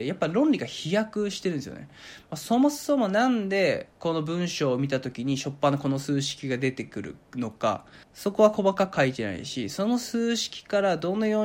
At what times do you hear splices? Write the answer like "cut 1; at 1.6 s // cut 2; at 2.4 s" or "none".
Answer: cut 1; at 3.9 s // cut 2; at 7.2 s // cut 3; at 8.0 s

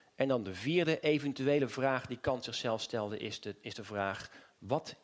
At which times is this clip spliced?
none

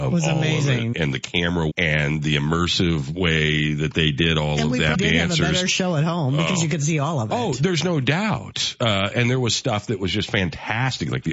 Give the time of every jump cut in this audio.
cut 1; at 0.9 s // cut 2; at 1.7 s // cut 3; at 4.9 s // cut 4; at 9.1 s

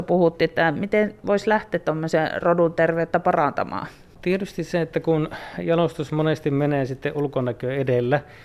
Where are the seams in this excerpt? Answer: none

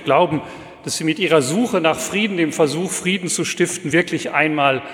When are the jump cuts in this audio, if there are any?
none

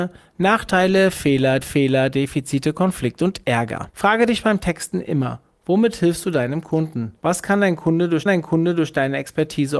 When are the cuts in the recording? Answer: cut 1; at 1.6 s // cut 2; at 3.9 s // cut 3; at 7.2 s // cut 4; at 8.3 s

